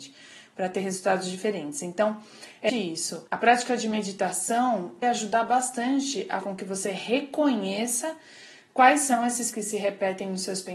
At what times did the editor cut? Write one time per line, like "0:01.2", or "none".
0:02.7
0:03.3
0:05.0
0:06.4
0:09.5